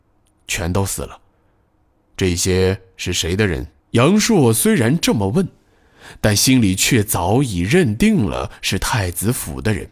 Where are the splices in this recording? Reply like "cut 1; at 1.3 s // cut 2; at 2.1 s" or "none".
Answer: cut 1; at 1.3 s // cut 2; at 3.8 s